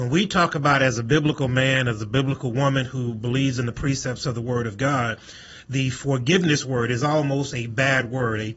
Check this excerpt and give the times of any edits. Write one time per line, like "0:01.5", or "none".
none